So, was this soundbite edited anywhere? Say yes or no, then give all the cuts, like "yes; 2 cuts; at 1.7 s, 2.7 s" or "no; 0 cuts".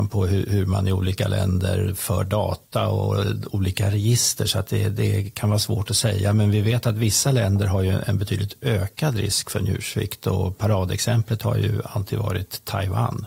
no; 0 cuts